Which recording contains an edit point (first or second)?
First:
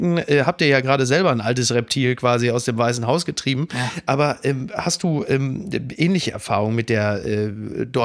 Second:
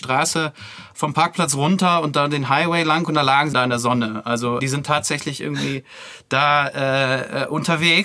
second